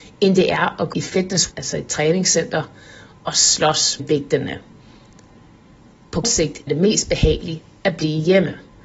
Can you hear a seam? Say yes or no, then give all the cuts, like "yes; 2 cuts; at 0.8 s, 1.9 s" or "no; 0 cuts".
yes; 5 cuts; at 0.9 s, 1.5 s, 4.0 s, 6.2 s, 6.7 s